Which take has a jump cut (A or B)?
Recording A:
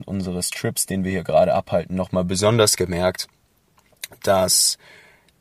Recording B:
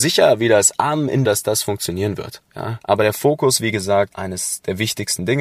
B